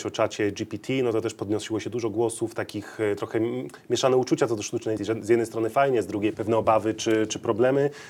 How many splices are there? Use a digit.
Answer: 2